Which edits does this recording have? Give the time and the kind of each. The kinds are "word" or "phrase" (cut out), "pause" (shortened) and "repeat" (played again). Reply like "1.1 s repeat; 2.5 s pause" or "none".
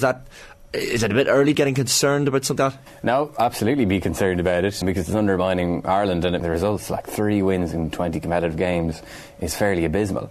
1.5 s word; 2.6 s word; 4.8 s word; 6.4 s phrase